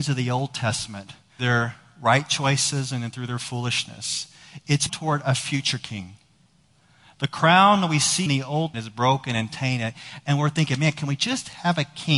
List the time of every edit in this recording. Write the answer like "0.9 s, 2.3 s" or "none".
1.4 s, 4.9 s, 8.3 s, 8.7 s